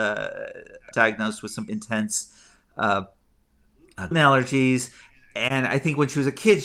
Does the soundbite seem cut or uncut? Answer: cut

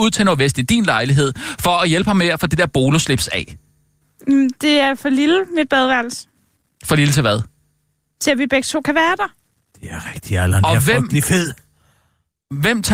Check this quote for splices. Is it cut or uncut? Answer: uncut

